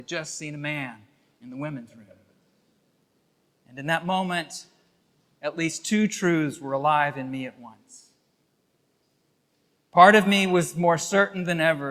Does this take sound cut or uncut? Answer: uncut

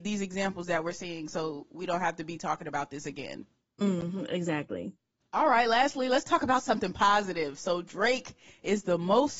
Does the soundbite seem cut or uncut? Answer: uncut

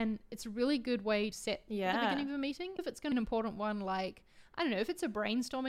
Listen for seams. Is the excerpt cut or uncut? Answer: cut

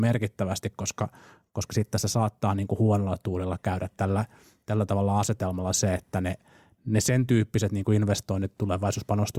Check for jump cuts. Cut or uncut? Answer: uncut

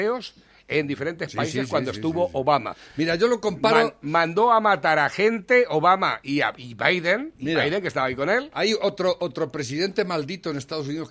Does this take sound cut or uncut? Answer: uncut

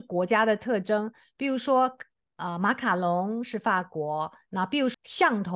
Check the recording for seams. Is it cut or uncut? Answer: uncut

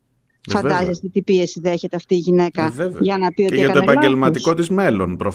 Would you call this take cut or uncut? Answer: uncut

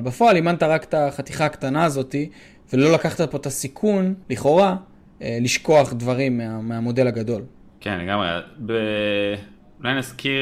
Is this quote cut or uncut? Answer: cut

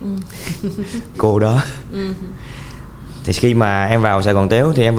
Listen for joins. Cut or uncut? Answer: cut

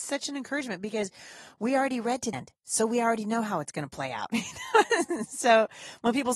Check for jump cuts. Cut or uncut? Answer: cut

